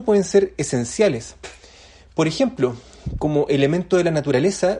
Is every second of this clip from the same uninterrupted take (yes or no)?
yes